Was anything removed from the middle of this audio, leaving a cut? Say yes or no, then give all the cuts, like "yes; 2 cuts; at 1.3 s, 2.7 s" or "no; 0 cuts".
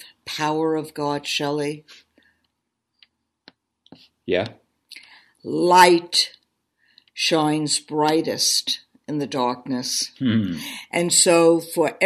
no; 0 cuts